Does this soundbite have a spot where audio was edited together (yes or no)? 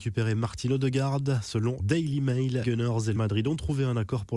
yes